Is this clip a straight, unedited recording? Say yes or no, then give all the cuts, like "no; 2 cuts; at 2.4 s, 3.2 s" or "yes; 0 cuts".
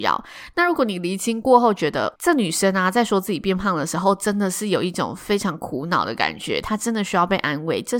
no; 1 cut; at 2.2 s